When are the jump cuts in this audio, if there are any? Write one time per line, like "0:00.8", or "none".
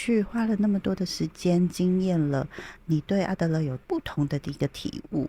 0:03.8